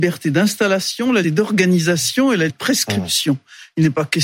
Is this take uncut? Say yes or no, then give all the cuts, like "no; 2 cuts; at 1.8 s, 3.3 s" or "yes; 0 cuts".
no; 2 cuts; at 1.2 s, 2.5 s